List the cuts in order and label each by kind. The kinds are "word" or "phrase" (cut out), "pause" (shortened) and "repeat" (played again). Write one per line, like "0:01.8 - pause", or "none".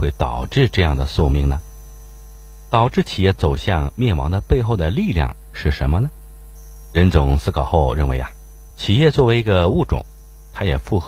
0:08.7 - pause